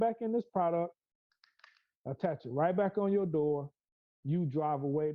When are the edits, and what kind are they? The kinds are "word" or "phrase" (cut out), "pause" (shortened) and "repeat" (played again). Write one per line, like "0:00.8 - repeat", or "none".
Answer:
none